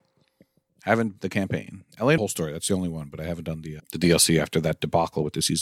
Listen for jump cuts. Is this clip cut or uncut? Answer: cut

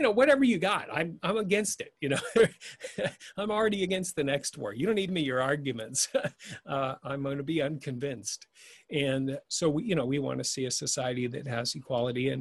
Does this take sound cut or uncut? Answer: cut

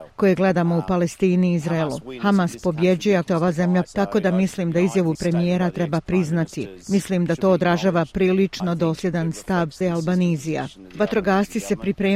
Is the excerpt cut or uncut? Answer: cut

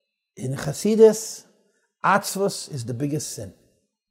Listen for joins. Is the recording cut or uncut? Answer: uncut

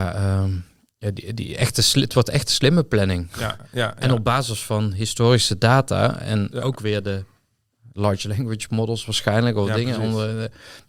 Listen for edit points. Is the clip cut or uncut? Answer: uncut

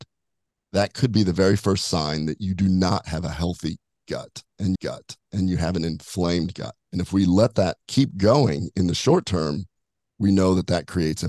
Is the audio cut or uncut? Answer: cut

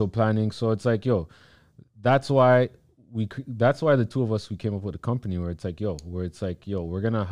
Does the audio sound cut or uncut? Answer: uncut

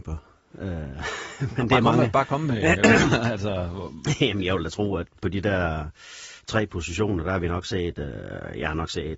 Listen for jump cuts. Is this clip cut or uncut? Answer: cut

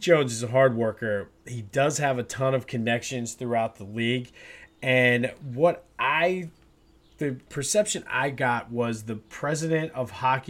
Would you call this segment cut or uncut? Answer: uncut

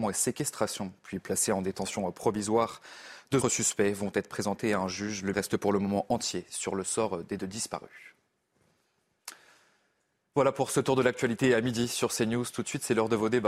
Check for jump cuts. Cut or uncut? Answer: cut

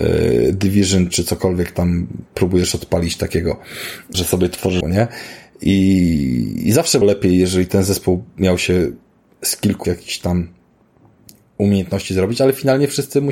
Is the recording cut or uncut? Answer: cut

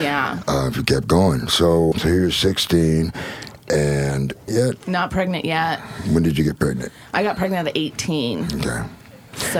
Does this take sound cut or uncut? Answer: cut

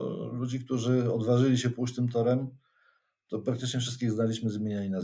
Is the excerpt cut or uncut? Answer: uncut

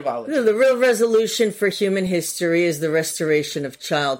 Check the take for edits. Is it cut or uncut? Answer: uncut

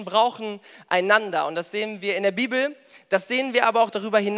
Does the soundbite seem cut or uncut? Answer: uncut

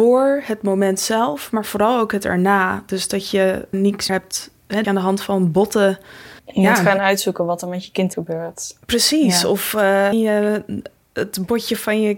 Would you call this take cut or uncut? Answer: cut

